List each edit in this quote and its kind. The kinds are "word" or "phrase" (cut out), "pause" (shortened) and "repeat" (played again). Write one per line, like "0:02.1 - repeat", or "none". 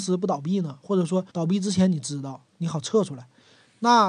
0:01.3 - pause

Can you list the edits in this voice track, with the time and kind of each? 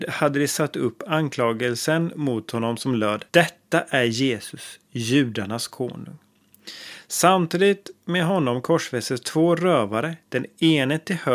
0:03.3 - pause
0:10.2 - pause

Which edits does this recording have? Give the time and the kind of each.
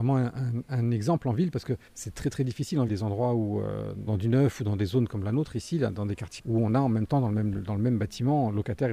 0:01.9 - pause
0:02.9 - phrase
0:04.1 - word
0:06.4 - word

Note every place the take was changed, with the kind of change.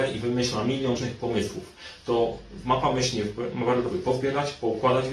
0:01.0 - word
0:03.9 - phrase

